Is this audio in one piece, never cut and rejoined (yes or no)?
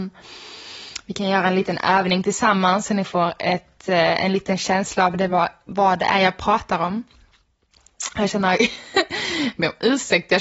yes